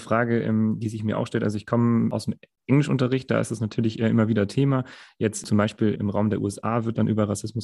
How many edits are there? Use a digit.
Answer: 1